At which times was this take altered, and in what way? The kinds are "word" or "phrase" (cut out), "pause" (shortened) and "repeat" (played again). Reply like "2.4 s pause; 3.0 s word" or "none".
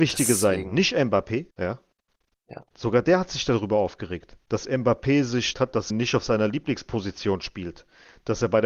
1.5 s pause; 4.4 s pause; 5.5 s phrase; 5.9 s word